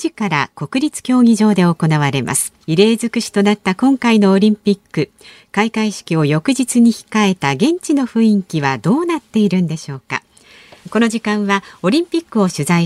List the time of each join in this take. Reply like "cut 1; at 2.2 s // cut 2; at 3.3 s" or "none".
cut 1; at 2.6 s